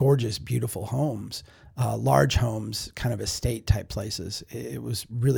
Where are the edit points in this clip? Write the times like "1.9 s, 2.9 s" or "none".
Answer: none